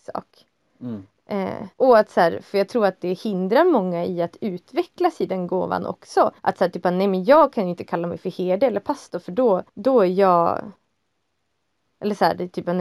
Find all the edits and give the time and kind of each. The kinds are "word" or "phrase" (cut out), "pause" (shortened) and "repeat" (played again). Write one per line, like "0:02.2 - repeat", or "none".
0:01.7 - pause
0:06.4 - pause
0:09.7 - pause

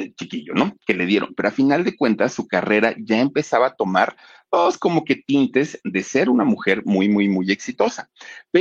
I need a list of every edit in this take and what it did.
none

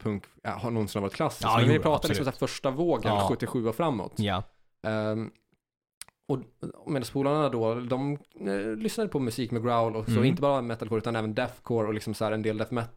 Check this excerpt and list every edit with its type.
none

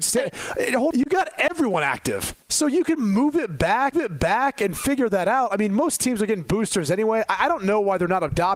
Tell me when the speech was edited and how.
0:00.9 - word
0:02.4 - pause
0:03.9 - repeat

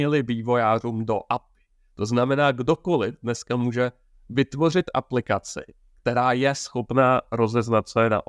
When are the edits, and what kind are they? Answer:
none

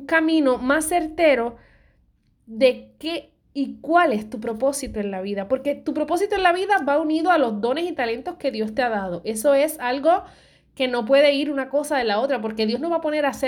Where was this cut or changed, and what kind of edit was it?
0:03.4 - pause

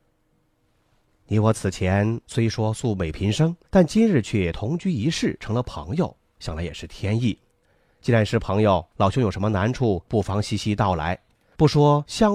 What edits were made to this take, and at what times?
0:02.2 - pause
0:03.6 - pause
0:08.9 - pause

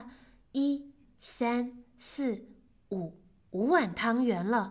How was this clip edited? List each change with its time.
0:01.0 - word

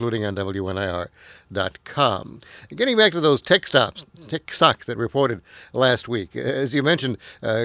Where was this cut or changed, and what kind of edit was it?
none

